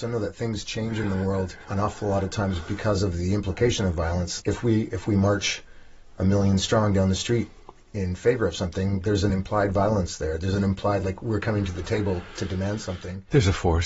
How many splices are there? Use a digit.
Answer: 0